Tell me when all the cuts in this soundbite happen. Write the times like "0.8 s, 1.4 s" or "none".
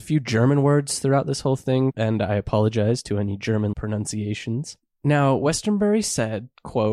3.7 s